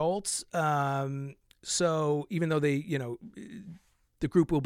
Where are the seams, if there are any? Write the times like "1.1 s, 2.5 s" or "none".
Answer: none